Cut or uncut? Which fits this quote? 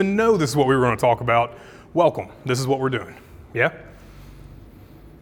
uncut